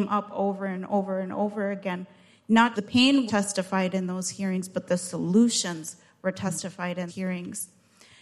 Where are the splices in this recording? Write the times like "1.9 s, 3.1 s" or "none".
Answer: 2.7 s, 3.3 s, 7.1 s